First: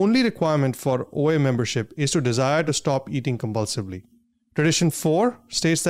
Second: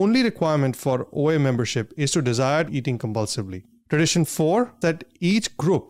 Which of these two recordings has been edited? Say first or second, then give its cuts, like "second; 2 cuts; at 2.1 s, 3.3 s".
second; 3 cuts; at 2.7 s, 3.8 s, 4.8 s